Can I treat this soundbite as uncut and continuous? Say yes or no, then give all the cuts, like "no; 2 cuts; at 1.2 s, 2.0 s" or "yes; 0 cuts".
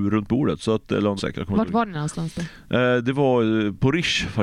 no; 1 cut; at 1.2 s